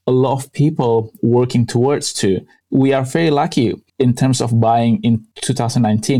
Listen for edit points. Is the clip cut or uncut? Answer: uncut